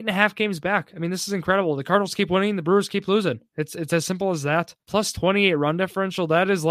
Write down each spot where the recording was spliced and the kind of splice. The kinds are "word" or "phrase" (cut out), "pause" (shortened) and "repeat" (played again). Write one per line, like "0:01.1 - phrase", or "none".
0:04.8 - pause